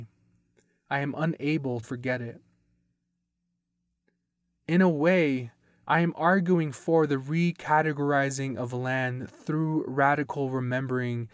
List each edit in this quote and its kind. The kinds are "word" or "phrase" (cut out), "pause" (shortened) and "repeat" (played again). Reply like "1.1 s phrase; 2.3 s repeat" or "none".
1.8 s word